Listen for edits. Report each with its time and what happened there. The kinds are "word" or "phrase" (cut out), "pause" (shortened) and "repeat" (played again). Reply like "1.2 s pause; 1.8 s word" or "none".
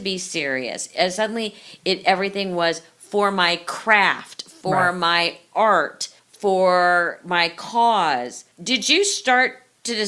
6.2 s pause; 8.5 s pause